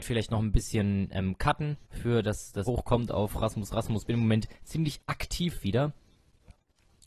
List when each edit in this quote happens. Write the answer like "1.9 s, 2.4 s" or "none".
1.8 s, 2.7 s